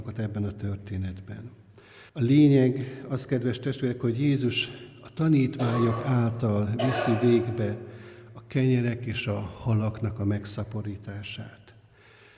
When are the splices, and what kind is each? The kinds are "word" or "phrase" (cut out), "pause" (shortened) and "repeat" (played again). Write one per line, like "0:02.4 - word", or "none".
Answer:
0:02.1 - pause